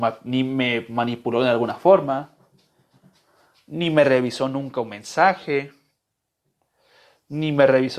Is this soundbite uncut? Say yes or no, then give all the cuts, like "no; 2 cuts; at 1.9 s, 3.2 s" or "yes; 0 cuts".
yes; 0 cuts